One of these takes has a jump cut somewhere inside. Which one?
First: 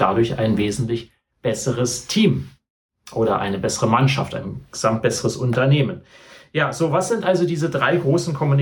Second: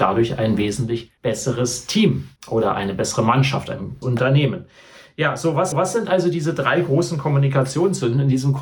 second; 4 cuts; at 1.2 s, 2.4 s, 4.0 s, 5.7 s

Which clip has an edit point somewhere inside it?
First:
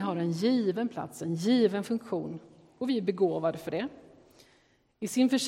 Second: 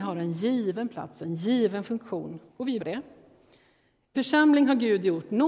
second; 3 cuts; at 2.5 s, 2.8 s, 4.1 s

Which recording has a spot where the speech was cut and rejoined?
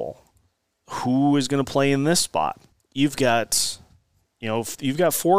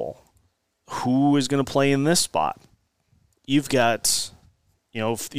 first; 1 cut; at 2.7 s

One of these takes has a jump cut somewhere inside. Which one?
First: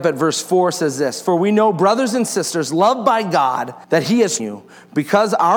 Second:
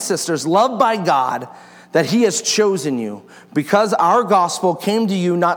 first; 2 cuts; at 3.8 s, 4.4 s

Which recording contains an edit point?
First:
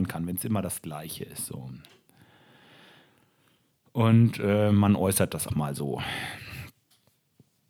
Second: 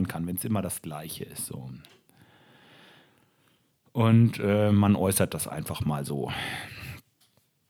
first; 1 cut; at 5.5 s

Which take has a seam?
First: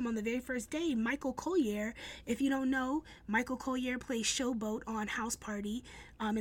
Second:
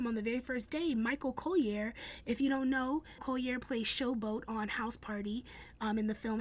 second; 1 cut; at 3.2 s

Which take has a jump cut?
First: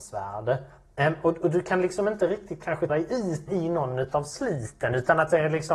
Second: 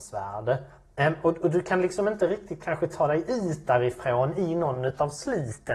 first; 2 cuts; at 2.9 s, 3.5 s

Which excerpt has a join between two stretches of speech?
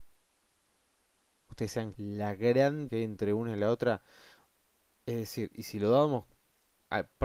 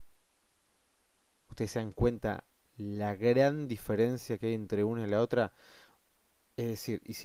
first; 2 cuts; at 1.9 s, 2.9 s

